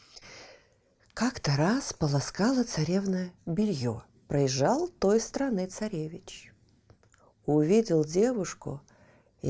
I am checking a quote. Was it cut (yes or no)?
yes